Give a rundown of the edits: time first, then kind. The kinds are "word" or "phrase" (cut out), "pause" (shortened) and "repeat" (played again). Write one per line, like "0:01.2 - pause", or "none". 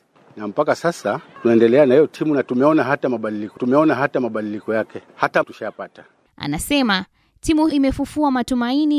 0:03.6 - repeat
0:05.4 - word
0:07.7 - word